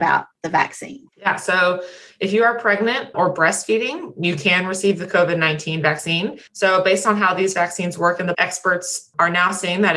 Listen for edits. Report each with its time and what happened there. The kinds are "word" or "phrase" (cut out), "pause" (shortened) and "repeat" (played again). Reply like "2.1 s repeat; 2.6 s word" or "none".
1.1 s pause; 3.1 s word; 6.5 s pause; 8.3 s word